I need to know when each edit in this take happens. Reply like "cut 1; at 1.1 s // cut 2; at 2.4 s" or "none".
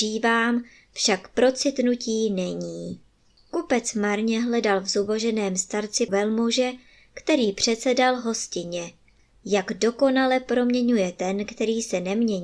cut 1; at 3.2 s // cut 2; at 6.1 s